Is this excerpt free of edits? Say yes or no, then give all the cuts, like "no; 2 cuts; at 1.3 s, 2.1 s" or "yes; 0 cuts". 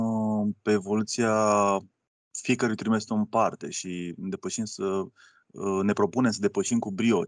yes; 0 cuts